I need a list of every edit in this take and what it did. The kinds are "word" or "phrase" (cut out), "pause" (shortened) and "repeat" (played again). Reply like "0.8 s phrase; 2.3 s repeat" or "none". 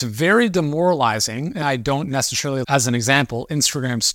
1.6 s phrase; 2.6 s word